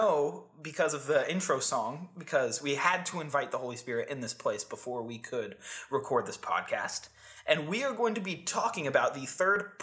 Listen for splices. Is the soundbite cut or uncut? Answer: uncut